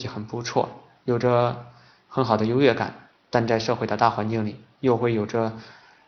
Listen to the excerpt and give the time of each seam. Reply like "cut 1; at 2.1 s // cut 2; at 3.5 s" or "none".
none